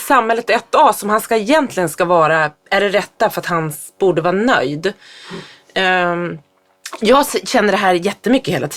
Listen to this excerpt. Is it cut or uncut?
uncut